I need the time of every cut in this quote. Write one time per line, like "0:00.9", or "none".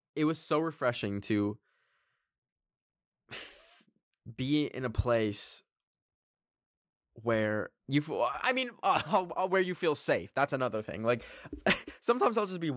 0:07.8